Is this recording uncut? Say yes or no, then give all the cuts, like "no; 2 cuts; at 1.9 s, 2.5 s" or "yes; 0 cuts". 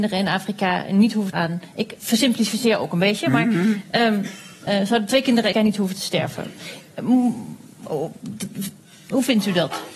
no; 4 cuts; at 1.3 s, 2.0 s, 4.7 s, 5.5 s